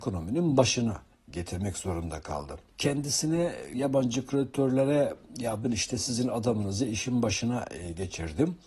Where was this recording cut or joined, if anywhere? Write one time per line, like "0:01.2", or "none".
0:03.7
0:05.6